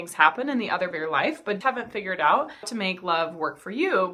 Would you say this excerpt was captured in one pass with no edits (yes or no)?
no